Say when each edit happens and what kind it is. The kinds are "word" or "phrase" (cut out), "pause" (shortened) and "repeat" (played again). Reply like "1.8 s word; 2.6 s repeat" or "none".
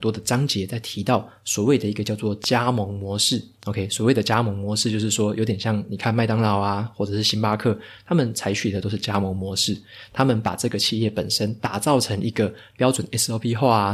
3.5 s pause